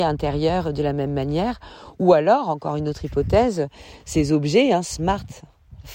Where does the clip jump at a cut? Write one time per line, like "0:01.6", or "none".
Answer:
none